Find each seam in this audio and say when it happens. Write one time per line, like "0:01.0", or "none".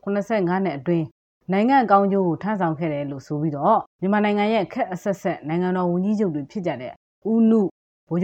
0:03.9